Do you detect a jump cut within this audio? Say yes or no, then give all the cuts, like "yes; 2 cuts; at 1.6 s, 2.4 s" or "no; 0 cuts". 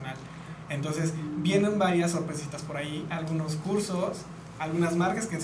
no; 0 cuts